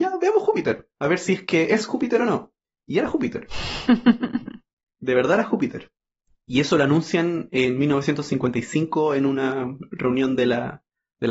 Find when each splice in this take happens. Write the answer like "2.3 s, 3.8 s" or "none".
none